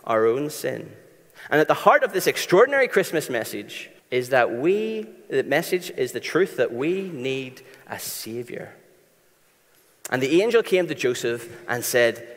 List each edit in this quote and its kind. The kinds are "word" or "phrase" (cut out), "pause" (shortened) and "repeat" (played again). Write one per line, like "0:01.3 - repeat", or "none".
0:04.0 - pause